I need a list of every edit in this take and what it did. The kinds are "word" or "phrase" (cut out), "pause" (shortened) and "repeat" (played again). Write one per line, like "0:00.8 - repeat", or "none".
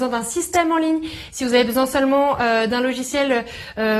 none